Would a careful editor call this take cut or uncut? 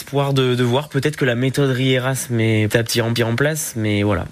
cut